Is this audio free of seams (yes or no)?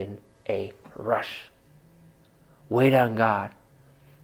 yes